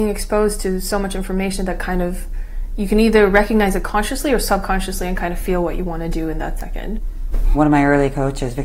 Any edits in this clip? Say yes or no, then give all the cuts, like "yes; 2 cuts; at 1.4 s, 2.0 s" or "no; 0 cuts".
no; 0 cuts